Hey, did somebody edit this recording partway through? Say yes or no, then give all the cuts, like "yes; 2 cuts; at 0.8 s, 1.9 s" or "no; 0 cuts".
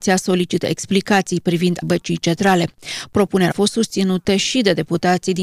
yes; 2 cuts; at 1.8 s, 3.5 s